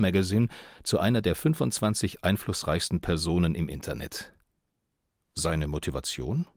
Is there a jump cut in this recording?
no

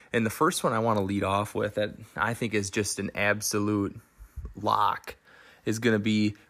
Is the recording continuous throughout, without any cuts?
yes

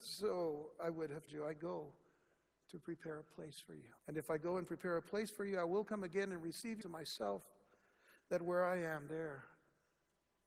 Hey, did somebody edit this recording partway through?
yes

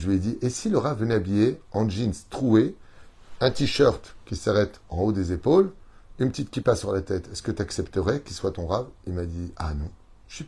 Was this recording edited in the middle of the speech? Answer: no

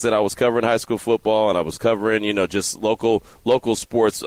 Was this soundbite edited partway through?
no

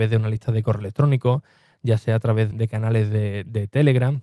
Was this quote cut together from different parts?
yes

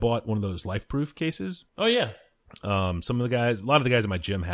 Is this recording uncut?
no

